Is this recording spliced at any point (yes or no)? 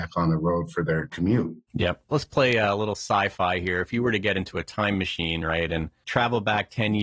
no